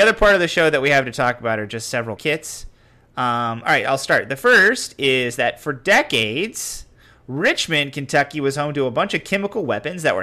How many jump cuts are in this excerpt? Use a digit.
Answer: 1